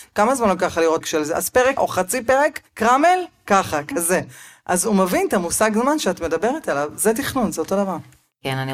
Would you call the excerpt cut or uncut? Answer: cut